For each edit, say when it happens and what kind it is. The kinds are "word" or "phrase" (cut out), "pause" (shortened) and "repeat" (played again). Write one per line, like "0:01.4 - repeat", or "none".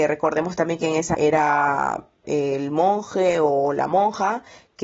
0:01.1 - word
0:02.2 - word